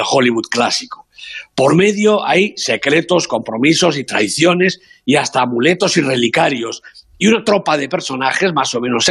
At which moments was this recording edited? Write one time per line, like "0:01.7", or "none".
none